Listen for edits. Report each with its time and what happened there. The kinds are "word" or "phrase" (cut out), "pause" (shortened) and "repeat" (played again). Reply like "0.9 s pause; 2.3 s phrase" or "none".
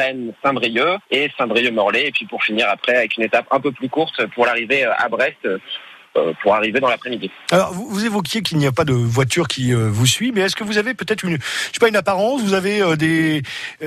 1.0 s pause